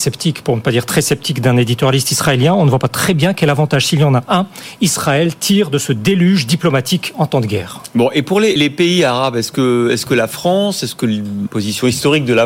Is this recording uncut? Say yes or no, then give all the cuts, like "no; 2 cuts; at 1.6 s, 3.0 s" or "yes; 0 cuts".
no; 2 cuts; at 8.6 s, 11.5 s